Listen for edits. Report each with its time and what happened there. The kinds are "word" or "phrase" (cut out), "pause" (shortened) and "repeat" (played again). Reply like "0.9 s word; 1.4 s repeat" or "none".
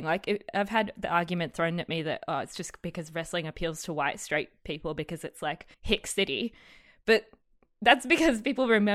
5.7 s pause